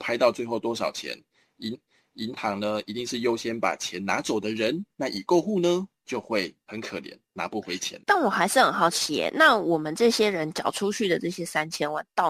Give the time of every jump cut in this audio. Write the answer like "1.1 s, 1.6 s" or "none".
1.7 s